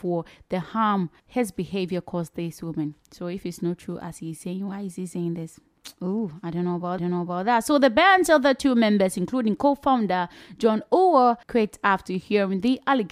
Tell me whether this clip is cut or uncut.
cut